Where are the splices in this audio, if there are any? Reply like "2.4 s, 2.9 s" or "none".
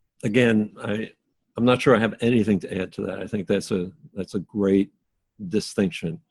none